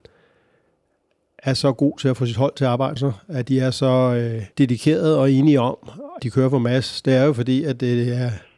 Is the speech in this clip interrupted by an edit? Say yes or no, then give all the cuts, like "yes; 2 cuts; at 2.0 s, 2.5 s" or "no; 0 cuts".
yes; 3 cuts; at 3.0 s, 4.5 s, 6.2 s